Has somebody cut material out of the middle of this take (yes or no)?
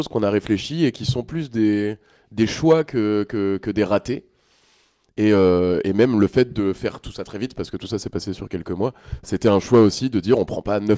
no